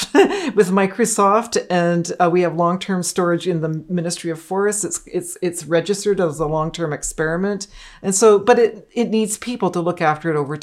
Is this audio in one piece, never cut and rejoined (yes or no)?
yes